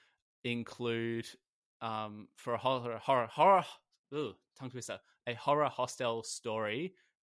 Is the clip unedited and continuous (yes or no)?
yes